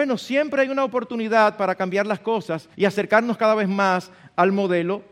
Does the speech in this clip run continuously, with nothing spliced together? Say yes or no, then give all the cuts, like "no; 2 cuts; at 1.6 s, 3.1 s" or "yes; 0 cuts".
no; 1 cut; at 2.7 s